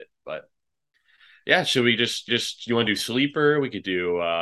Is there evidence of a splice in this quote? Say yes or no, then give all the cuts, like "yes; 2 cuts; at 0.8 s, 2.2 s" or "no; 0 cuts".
yes; 1 cut; at 2.3 s